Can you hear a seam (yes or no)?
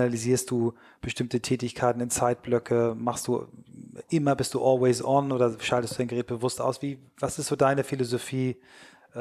no